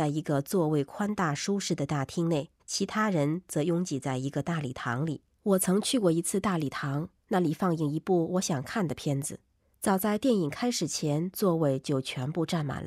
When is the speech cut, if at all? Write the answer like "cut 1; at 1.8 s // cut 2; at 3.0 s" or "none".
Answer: cut 1; at 2.6 s // cut 2; at 5.3 s // cut 3; at 7.2 s // cut 4; at 9.7 s